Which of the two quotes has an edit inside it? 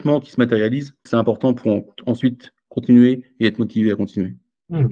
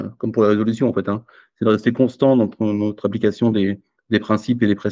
first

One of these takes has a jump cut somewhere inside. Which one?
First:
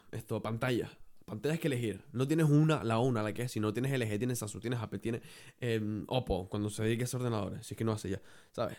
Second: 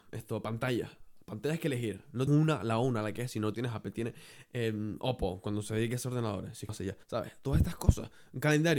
second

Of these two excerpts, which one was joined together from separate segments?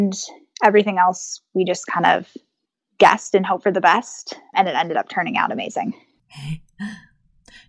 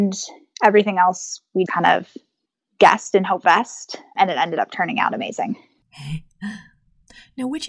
second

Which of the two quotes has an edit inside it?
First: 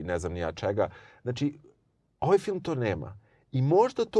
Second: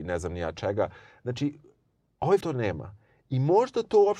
second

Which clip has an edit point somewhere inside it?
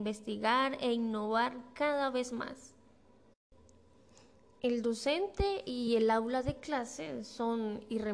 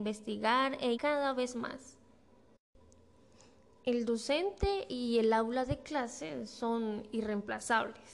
second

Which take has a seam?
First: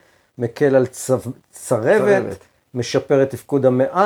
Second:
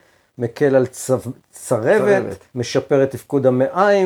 second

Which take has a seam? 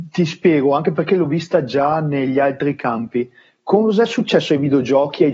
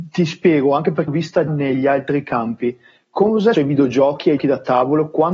second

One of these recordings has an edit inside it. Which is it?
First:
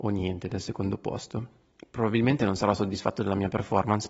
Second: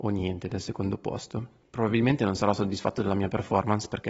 second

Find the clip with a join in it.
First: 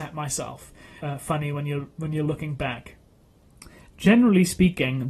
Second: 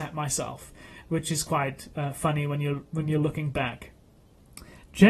first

